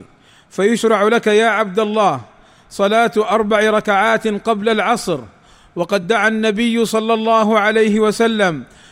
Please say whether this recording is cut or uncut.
uncut